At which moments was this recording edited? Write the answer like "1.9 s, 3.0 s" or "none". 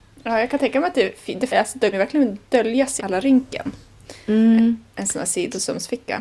1.5 s, 1.9 s, 3.0 s